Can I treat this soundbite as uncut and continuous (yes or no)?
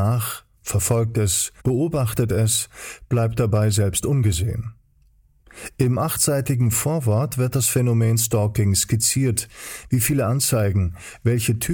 no